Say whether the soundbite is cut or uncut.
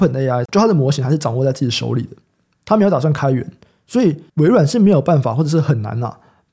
uncut